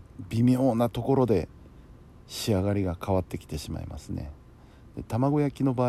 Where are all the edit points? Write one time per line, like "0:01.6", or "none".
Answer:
0:02.2